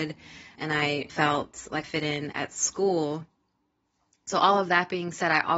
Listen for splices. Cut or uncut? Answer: cut